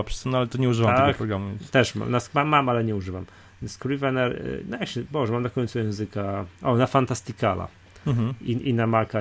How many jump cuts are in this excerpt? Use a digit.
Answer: 0